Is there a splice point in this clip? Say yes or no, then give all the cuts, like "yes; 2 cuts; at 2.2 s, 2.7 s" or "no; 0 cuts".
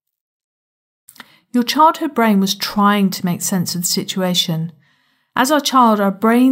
no; 0 cuts